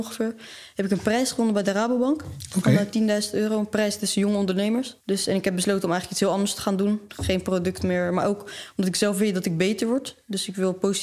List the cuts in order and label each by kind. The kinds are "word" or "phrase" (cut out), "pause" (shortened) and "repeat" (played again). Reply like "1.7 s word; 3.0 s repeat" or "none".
5.0 s pause